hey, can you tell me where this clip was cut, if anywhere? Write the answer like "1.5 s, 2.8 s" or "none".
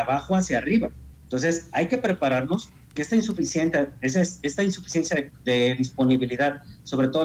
1.1 s, 3.0 s